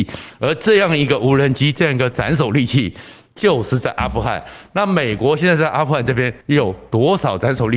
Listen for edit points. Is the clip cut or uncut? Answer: cut